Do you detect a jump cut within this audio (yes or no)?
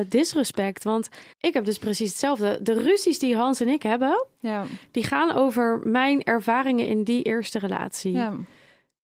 yes